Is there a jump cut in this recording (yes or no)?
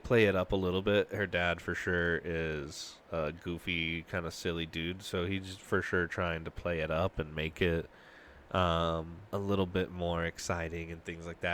yes